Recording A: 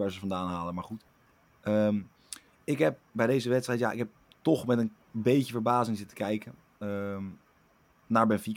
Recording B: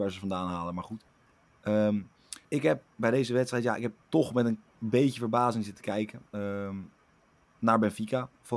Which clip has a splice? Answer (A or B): B